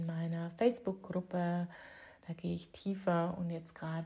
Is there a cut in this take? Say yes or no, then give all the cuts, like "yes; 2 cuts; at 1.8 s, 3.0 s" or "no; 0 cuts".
no; 0 cuts